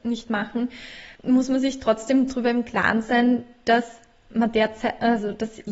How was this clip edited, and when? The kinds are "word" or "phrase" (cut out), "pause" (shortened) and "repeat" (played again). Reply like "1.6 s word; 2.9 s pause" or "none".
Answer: 1.2 s pause